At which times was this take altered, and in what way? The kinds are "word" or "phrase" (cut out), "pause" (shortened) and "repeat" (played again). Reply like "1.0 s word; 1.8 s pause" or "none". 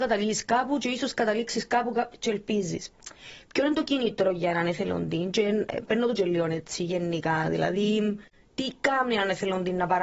none

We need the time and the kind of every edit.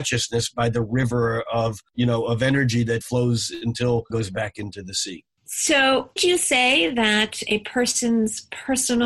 3.0 s word; 4.1 s word; 6.2 s word

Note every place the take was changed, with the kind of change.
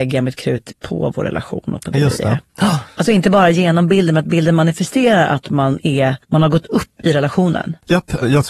2.5 s pause; 6.2 s pause

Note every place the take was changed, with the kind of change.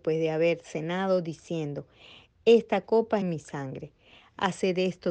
3.2 s phrase

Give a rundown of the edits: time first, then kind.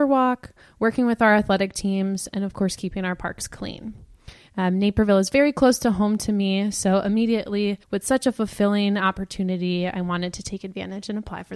7.8 s pause

